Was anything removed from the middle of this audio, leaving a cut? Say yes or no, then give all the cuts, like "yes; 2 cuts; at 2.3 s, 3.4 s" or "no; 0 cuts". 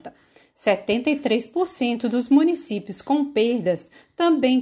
no; 0 cuts